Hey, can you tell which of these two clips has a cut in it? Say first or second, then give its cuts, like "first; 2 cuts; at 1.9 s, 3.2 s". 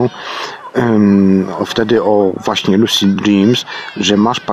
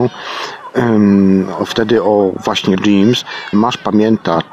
second; 2 cuts; at 2.7 s, 3.5 s